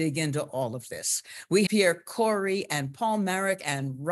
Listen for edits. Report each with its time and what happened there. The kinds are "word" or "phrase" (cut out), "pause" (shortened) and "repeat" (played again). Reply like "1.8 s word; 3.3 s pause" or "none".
1.7 s word